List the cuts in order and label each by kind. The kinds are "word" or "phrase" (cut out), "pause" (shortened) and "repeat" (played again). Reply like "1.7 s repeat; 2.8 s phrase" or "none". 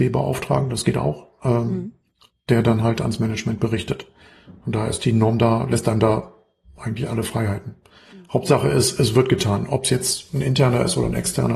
none